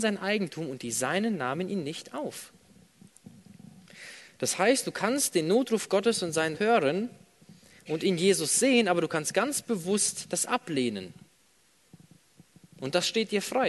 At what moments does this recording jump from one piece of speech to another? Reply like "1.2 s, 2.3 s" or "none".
6.6 s